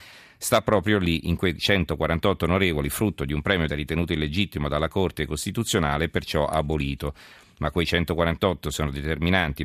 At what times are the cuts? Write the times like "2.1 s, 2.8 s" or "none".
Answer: 3.7 s